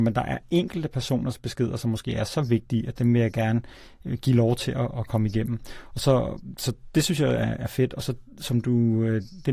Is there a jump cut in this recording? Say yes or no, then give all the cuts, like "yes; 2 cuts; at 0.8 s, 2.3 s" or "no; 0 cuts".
no; 0 cuts